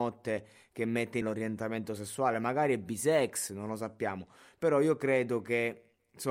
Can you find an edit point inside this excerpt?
yes; 1 cut; at 1.2 s

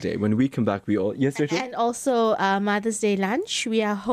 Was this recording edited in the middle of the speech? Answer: no; 0 cuts

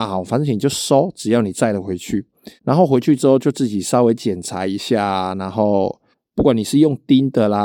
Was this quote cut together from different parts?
yes; 2 cuts; at 2.6 s, 6.1 s

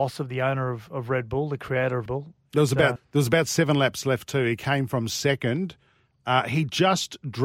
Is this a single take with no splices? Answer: no; 2 cuts; at 2.1 s, 3.0 s

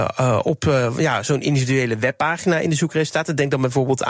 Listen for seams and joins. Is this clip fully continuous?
yes; 0 cuts

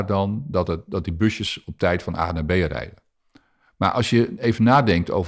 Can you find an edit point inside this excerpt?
no; 0 cuts

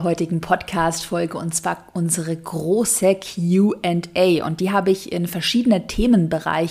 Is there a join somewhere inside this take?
no; 0 cuts

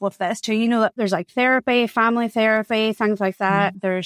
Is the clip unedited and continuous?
yes; 0 cuts

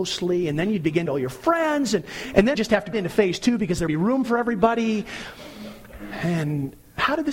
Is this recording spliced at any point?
yes; 4 cuts; at 1.1 s, 2.5 s, 2.9 s, 3.9 s

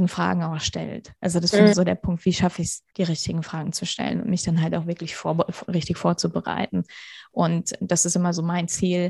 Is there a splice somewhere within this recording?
yes; 2 cuts; at 1.7 s, 2.9 s

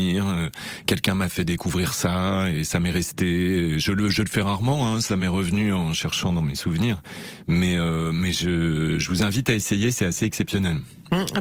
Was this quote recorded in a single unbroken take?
yes; 0 cuts

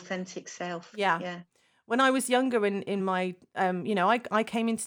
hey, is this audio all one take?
yes; 0 cuts

